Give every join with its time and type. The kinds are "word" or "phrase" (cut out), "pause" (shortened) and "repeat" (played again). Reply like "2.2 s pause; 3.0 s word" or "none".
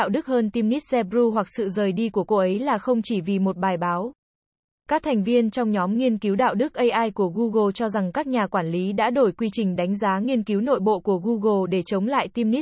none